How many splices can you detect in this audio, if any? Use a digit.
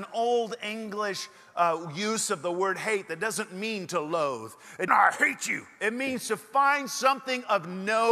1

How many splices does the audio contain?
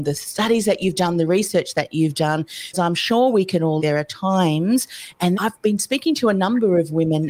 3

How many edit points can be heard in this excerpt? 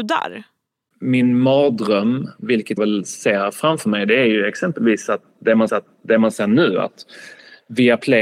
2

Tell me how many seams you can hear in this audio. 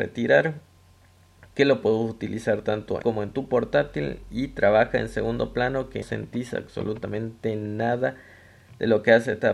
2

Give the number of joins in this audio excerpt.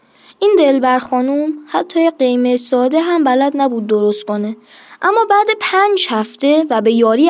0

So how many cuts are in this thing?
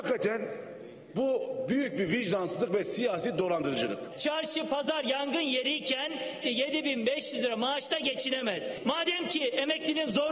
1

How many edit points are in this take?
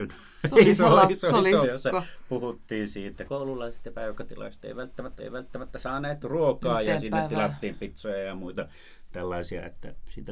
3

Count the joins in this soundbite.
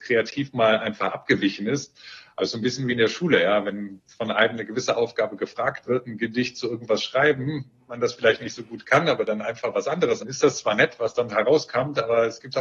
1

